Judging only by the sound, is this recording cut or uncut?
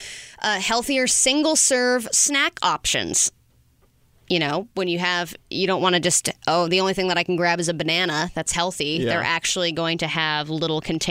uncut